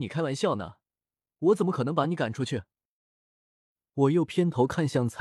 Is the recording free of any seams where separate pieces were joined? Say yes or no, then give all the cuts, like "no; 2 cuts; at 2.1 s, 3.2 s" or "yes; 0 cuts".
yes; 0 cuts